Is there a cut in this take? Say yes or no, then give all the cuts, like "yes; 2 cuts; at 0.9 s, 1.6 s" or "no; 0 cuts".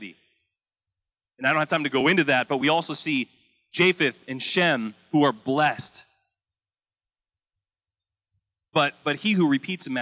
no; 0 cuts